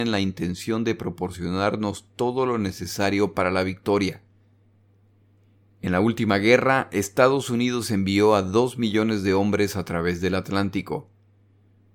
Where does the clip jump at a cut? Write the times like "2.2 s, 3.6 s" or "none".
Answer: none